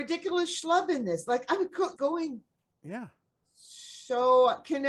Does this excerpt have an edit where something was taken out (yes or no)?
yes